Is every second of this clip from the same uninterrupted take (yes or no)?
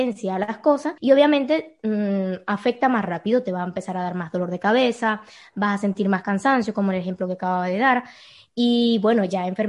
no